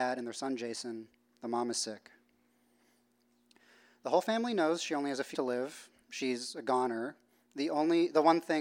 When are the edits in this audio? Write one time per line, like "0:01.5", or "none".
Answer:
0:05.3